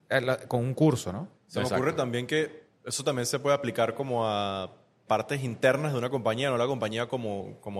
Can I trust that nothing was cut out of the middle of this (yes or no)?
no